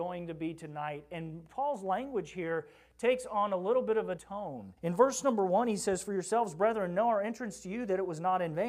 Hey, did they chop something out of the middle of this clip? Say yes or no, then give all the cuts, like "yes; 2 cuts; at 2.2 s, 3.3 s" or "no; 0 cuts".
yes; 2 cuts; at 4.2 s, 4.8 s